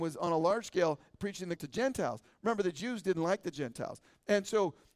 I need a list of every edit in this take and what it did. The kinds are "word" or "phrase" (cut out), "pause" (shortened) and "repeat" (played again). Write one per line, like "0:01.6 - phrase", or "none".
0:01.6 - word

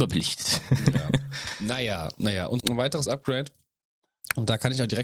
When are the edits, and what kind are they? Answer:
0:02.6 - word
0:03.1 - word

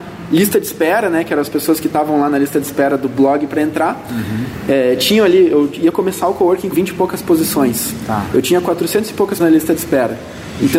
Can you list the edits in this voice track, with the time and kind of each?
0:06.7 - word
0:09.4 - word

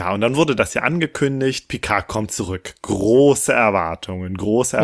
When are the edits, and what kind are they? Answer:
none

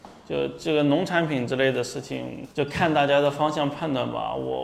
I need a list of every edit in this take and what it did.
0:02.5 - pause

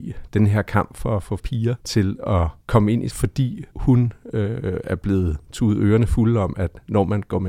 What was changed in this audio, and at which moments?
0:01.4 - word
0:01.8 - pause
0:02.6 - pause
0:03.1 - word
0:03.7 - pause
0:05.4 - pause

